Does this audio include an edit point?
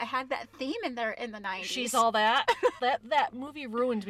yes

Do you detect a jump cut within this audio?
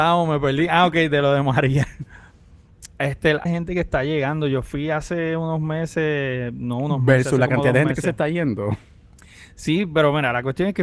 yes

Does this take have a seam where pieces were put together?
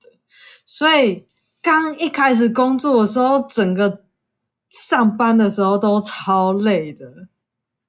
no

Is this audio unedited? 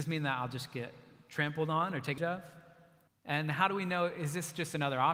no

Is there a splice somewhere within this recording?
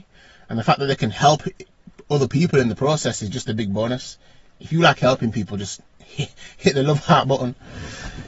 no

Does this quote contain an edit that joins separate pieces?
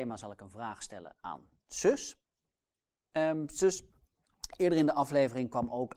no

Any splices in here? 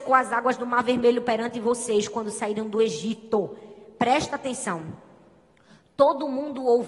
no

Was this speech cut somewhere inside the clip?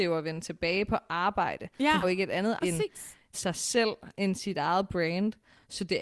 yes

